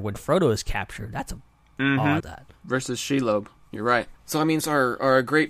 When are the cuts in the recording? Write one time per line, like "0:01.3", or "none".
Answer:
0:02.2
0:04.2
0:04.6